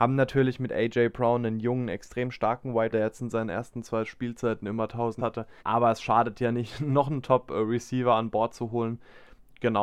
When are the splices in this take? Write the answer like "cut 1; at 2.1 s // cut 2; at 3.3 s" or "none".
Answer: cut 1; at 2.9 s // cut 2; at 5.2 s // cut 3; at 5.6 s